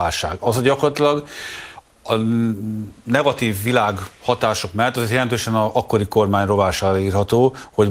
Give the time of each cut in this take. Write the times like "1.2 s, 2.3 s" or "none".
none